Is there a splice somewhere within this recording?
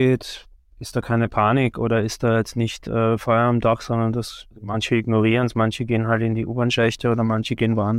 yes; 1 cut; at 4.5 s

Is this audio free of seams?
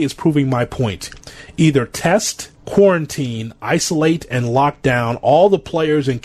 no; 1 cut; at 2.6 s

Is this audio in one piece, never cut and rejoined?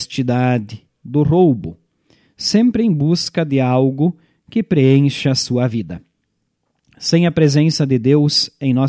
yes; 0 cuts

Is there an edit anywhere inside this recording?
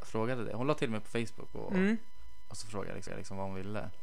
yes; 1 cut; at 3.1 s

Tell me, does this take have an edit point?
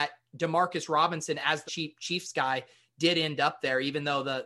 yes; 1 cut; at 1.7 s

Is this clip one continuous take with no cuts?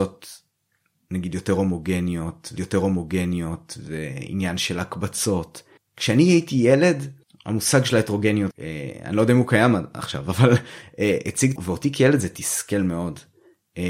no; 5 cuts; at 2.6 s, 5.8 s, 7.2 s, 8.5 s, 11.6 s

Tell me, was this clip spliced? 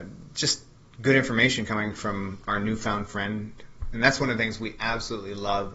no; 0 cuts

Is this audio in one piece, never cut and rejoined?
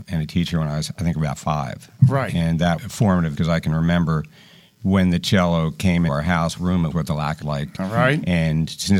no; 6 cuts; at 2.8 s, 3.3 s, 6.1 s, 6.6 s, 6.9 s, 7.4 s

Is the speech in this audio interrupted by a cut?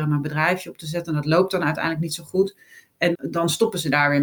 yes; 1 cut; at 3.1 s

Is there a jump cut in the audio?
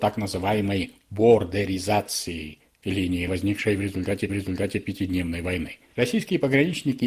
yes; 2 cuts; at 3.3 s, 4.3 s

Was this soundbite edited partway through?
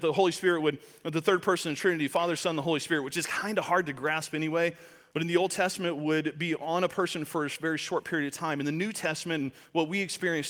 no; 0 cuts

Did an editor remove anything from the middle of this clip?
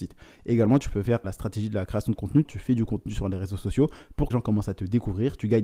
yes; 3 cuts; at 1.2 s, 2.5 s, 4.3 s

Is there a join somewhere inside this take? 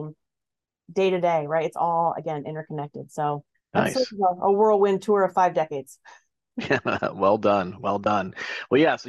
yes; 1 cut; at 3.5 s

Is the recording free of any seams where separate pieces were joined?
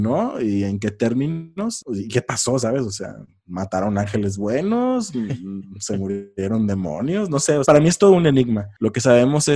no; 1 cut; at 7.6 s

